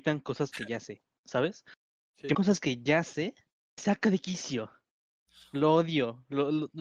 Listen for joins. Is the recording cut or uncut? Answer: cut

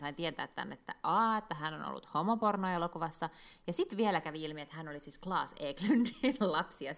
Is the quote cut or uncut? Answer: uncut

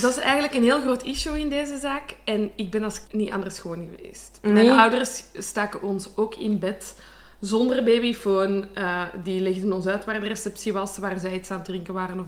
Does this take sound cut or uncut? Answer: cut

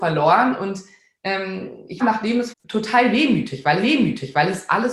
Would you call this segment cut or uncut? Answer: cut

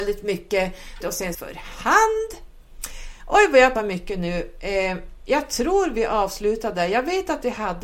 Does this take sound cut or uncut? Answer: cut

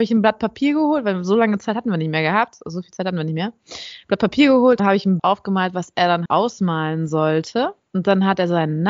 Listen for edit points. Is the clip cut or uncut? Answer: cut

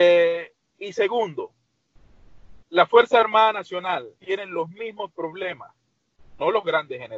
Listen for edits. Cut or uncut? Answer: cut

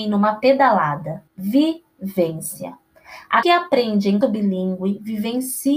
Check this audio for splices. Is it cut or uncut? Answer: cut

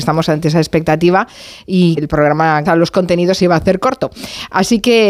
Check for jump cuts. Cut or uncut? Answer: cut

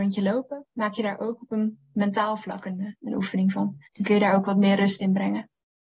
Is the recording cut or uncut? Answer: cut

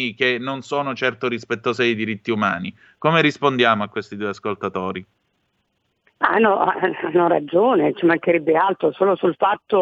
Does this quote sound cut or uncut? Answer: uncut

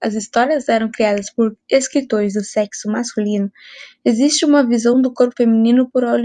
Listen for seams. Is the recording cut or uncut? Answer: uncut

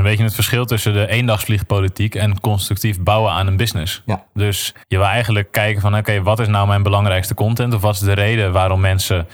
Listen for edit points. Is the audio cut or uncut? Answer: cut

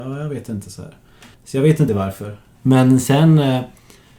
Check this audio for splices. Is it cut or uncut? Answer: cut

